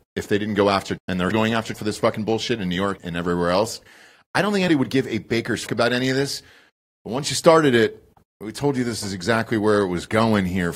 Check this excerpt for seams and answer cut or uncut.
cut